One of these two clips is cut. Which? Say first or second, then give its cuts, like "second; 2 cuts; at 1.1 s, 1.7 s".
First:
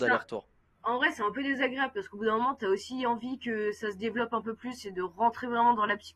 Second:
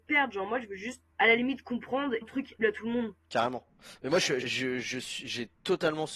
second; 4 cuts; at 1.1 s, 2.2 s, 2.6 s, 4.4 s